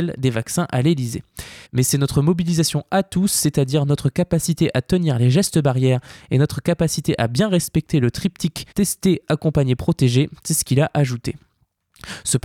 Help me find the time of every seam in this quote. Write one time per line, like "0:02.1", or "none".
0:01.7
0:08.7